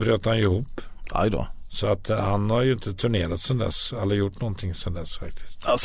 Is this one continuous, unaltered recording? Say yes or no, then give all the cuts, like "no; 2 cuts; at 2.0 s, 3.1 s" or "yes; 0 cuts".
yes; 0 cuts